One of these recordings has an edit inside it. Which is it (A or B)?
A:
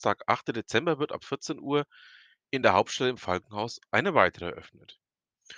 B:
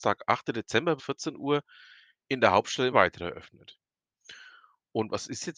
B